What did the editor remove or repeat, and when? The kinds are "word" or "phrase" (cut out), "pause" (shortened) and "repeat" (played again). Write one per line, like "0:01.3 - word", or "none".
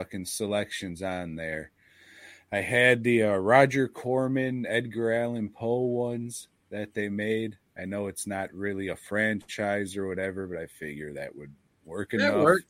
none